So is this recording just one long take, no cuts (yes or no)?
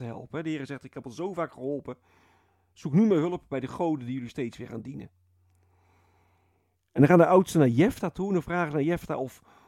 yes